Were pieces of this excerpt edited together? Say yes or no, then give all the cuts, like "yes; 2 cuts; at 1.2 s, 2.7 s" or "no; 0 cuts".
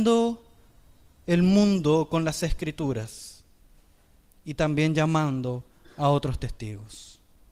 no; 0 cuts